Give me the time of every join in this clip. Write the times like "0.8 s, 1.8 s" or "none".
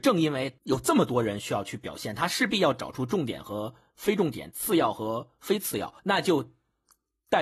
6.0 s